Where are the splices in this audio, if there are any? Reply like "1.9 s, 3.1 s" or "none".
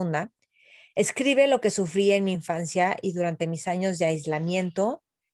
none